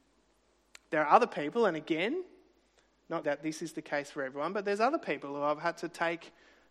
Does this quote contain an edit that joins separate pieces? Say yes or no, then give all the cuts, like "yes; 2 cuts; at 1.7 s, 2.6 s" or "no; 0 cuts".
yes; 1 cut; at 3.2 s